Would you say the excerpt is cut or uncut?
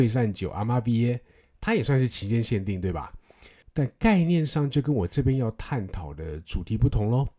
uncut